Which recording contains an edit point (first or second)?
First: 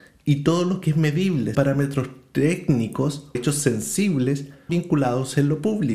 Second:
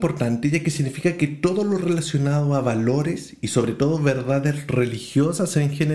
first